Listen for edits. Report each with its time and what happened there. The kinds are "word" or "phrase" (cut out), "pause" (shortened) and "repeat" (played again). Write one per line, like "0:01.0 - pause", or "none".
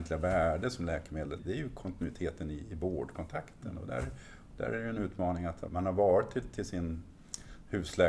0:01.4 - word
0:05.7 - word